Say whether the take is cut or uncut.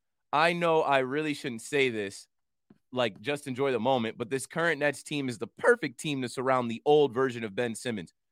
uncut